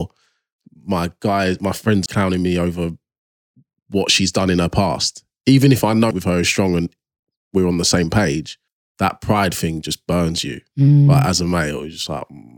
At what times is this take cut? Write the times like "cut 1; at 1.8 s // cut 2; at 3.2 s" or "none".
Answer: cut 1; at 2.1 s // cut 2; at 6.1 s // cut 3; at 8.7 s